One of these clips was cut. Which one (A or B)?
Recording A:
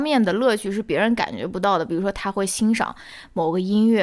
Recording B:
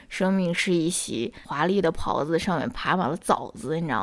B